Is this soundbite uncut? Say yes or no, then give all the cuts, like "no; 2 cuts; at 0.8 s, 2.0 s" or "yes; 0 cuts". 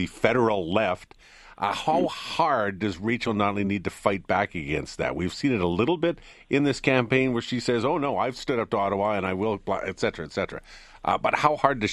yes; 0 cuts